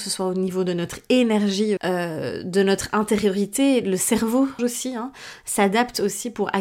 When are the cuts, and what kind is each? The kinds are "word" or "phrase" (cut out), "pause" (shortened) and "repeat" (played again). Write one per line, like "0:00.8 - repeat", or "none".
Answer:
0:01.8 - word
0:04.6 - word